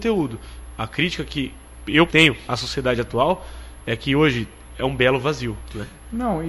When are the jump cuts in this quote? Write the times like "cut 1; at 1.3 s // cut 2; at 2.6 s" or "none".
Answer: cut 1; at 2.1 s